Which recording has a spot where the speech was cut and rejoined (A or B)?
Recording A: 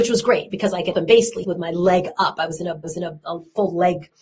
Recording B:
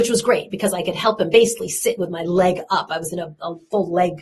A